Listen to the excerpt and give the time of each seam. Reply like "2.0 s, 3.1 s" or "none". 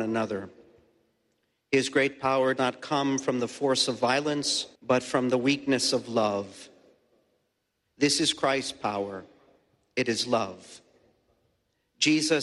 2.6 s, 4.7 s